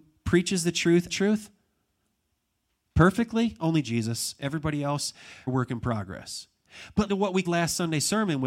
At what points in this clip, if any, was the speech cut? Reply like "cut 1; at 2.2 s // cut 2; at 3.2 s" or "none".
cut 1; at 1.1 s // cut 2; at 5.5 s // cut 3; at 7.1 s // cut 4; at 7.4 s